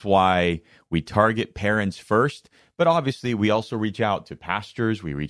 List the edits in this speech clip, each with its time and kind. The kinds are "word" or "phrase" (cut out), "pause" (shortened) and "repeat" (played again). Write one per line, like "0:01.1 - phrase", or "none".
none